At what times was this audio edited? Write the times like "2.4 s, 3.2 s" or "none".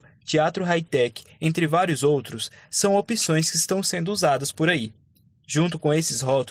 none